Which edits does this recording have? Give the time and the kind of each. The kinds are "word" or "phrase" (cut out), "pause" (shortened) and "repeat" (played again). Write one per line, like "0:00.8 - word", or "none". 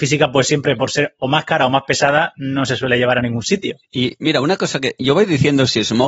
0:03.8 - pause